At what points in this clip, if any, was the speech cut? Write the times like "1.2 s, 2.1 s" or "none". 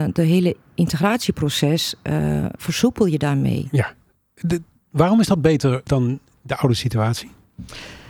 none